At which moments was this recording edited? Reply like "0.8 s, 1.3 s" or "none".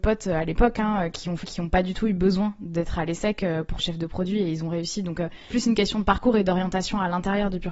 1.4 s, 3.8 s, 5.5 s